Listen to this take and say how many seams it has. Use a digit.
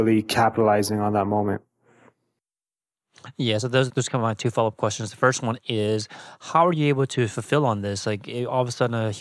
1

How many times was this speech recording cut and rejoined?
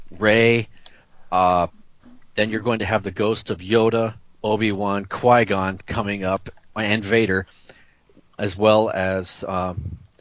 0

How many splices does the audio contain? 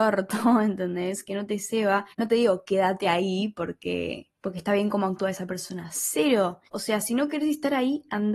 3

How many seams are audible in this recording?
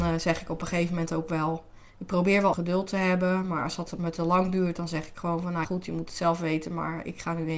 3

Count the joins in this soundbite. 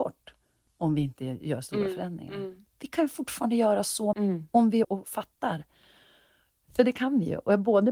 2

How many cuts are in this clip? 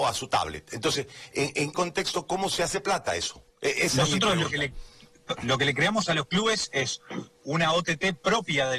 2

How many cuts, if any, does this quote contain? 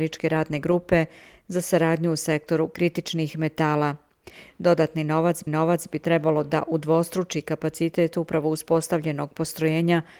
1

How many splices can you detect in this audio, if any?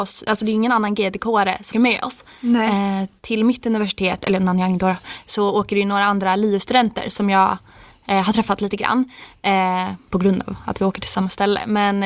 1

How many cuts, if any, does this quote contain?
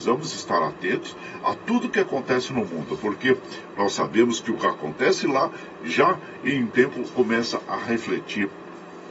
1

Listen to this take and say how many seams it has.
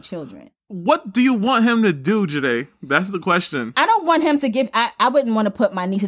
0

